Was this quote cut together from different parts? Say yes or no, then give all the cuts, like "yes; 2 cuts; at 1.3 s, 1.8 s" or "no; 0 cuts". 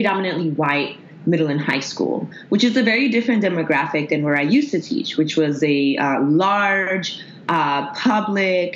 no; 0 cuts